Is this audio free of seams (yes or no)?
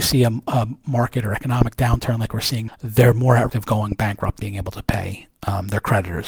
no